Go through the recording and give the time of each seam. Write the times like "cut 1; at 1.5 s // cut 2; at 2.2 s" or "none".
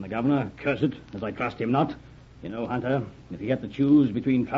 cut 1; at 2.2 s